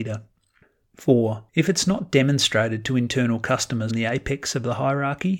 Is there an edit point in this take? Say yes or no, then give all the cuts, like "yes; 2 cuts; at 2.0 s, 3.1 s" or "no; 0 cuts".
yes; 2 cuts; at 1.5 s, 3.9 s